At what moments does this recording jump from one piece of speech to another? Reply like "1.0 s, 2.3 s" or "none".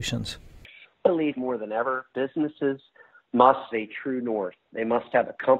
1.1 s, 1.4 s, 3.7 s